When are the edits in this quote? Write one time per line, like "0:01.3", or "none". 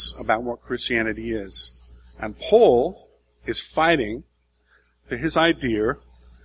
none